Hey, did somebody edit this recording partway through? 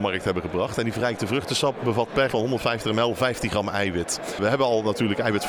yes; 1 cut; at 2.3 s

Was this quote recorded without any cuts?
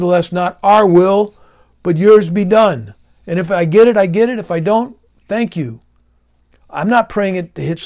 yes; 0 cuts

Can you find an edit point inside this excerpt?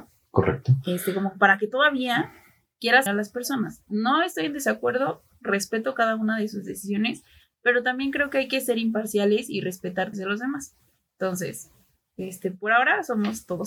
yes; 2 cuts; at 3.1 s, 10.1 s

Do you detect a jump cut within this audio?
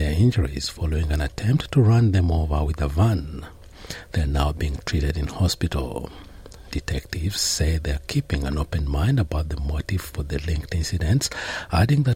no; 0 cuts

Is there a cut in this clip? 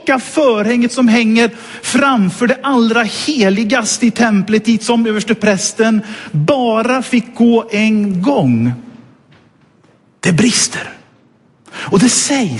no; 0 cuts

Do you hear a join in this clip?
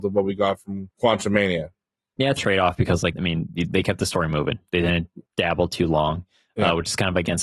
yes; 4 cuts; at 0.9 s, 2.4 s, 3.1 s, 5.3 s

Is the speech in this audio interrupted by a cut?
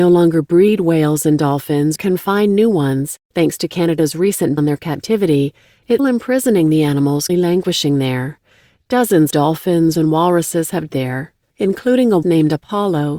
yes; 8 cuts; at 2.0 s, 4.6 s, 6.0 s, 7.3 s, 9.3 s, 9.9 s, 10.9 s, 12.2 s

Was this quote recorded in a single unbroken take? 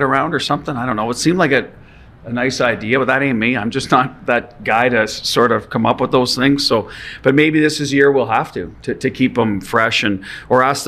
yes; 0 cuts

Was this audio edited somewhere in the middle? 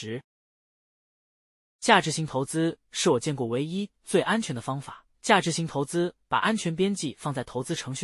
yes; 1 cut; at 5.1 s

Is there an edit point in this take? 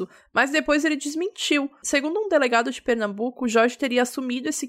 no; 0 cuts

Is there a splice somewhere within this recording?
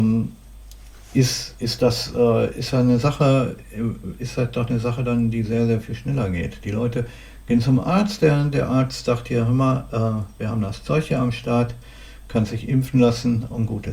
no; 0 cuts

